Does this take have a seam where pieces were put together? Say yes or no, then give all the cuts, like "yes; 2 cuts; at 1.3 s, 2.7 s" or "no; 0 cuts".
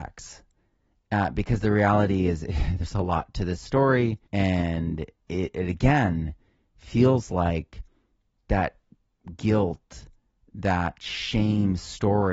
yes; 1 cut; at 4.3 s